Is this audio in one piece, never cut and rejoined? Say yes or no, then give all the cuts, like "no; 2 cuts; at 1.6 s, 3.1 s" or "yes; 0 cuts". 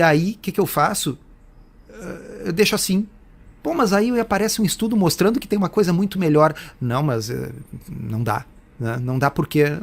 yes; 0 cuts